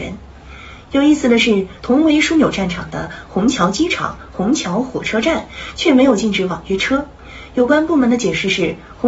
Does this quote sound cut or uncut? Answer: cut